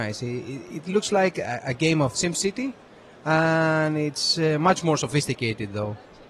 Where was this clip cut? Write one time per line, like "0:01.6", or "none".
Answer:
0:02.1